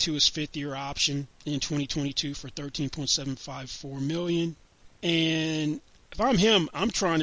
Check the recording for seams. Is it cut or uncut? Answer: cut